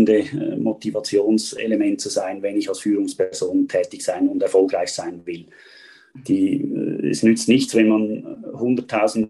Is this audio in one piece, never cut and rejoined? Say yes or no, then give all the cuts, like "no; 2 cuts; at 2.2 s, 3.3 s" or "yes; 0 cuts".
yes; 0 cuts